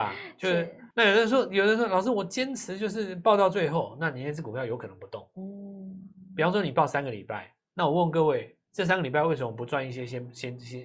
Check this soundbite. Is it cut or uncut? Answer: cut